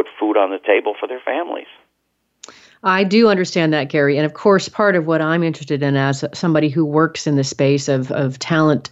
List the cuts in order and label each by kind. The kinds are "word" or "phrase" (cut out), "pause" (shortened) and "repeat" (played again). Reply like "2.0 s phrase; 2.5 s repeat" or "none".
none